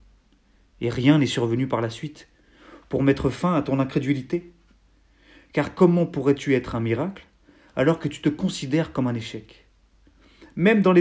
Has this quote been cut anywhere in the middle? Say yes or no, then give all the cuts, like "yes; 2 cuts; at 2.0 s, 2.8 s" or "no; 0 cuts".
no; 0 cuts